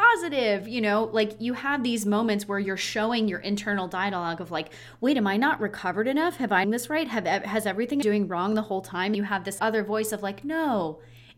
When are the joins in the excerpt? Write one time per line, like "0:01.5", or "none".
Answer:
0:06.6
0:08.0
0:09.1
0:09.6